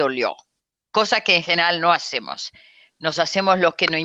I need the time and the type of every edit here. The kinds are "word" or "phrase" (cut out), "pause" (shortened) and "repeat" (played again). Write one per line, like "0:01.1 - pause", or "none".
none